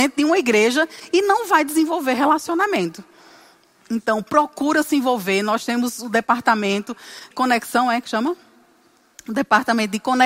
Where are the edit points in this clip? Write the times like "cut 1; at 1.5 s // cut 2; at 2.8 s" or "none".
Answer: cut 1; at 7.3 s